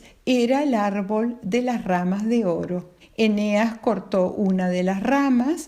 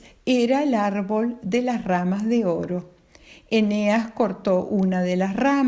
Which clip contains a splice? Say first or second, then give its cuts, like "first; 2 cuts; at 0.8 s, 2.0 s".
first; 1 cut; at 3.0 s